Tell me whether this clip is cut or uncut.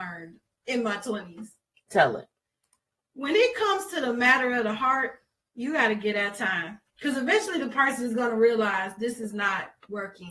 uncut